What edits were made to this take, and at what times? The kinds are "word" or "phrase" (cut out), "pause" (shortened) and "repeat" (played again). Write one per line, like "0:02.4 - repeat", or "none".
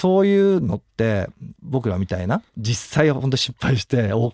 0:02.5 - pause